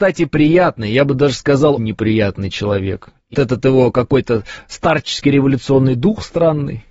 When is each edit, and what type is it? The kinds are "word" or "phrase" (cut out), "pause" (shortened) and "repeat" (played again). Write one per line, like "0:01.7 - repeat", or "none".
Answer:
0:01.8 - word
0:03.3 - word